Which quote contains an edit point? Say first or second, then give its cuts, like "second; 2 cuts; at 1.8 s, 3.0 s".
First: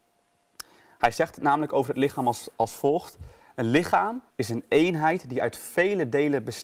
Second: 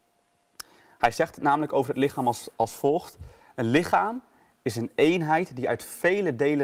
first; 1 cut; at 4.3 s